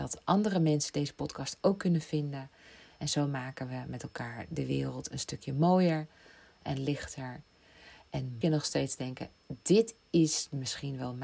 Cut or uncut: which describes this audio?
cut